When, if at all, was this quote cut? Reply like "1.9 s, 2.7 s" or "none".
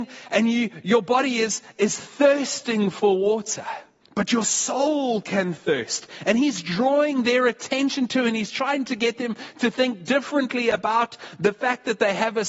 4.0 s